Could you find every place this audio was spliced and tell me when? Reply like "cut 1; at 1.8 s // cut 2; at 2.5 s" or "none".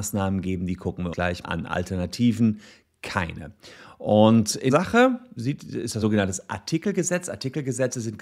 cut 1; at 1.1 s // cut 2; at 1.4 s // cut 3; at 4.7 s // cut 4; at 5.4 s // cut 5; at 6.0 s